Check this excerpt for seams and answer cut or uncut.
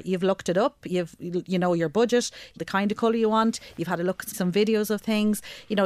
cut